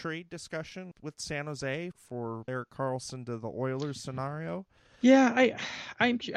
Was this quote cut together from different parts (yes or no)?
yes